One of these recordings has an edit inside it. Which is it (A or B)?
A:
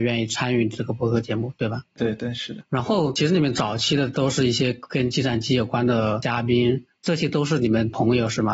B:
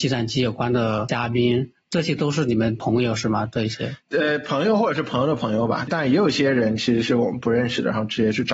B